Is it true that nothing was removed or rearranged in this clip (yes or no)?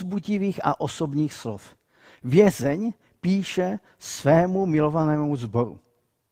yes